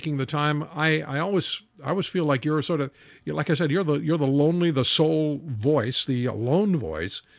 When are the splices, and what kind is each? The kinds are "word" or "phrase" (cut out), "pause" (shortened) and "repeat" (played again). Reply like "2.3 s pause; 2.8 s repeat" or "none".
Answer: none